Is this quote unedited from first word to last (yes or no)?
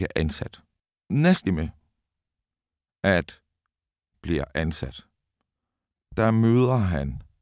no